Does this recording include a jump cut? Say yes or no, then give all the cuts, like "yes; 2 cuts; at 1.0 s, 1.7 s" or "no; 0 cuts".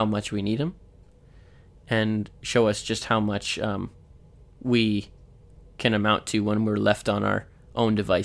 no; 0 cuts